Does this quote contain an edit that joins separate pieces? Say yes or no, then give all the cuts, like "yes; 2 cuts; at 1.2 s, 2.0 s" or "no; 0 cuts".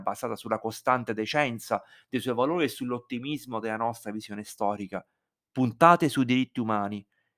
no; 0 cuts